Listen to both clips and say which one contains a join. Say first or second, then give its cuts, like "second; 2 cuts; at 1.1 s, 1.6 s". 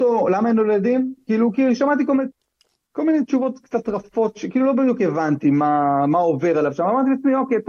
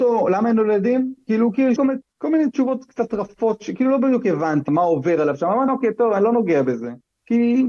second; 4 cuts; at 1.8 s, 2.1 s, 4.7 s, 5.7 s